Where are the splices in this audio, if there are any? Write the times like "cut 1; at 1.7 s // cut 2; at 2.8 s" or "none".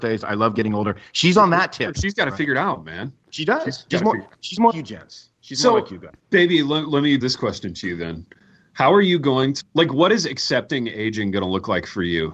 cut 1; at 3.9 s // cut 2; at 4.7 s // cut 3; at 5.3 s // cut 4; at 6.2 s // cut 5; at 7.2 s // cut 6; at 9.6 s